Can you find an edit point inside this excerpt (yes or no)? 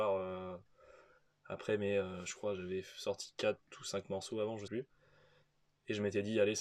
yes